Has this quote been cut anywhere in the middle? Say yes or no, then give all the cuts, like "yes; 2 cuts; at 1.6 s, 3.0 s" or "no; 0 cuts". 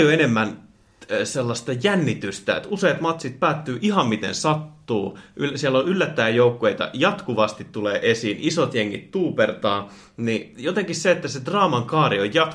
no; 0 cuts